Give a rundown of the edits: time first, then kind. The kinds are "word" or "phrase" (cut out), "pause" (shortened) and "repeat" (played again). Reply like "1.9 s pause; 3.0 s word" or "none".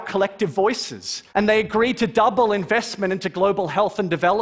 1.3 s pause